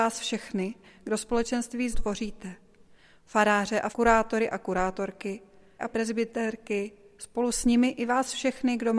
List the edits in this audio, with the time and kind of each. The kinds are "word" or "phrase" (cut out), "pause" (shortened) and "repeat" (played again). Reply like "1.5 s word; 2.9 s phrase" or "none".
1.9 s word; 3.9 s word; 5.8 s word